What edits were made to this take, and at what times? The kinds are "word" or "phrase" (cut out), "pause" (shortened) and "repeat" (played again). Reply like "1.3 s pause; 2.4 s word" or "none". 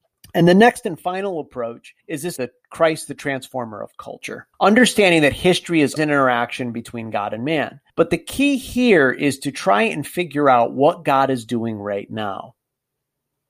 2.0 s pause; 2.4 s phrase; 4.5 s pause; 6.0 s word; 7.9 s pause